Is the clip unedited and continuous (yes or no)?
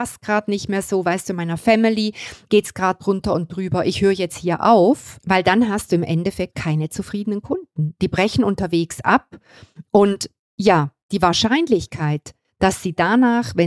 no